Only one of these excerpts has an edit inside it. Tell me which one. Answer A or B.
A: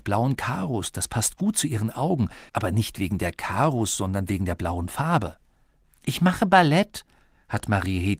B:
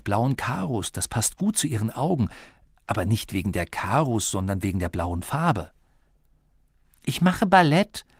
A